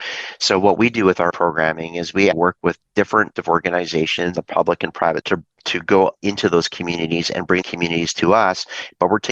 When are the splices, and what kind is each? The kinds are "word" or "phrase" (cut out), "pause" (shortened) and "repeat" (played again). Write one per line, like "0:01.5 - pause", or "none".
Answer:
0:01.3 - word
0:02.3 - word
0:03.4 - word
0:04.3 - word
0:05.2 - word
0:07.6 - word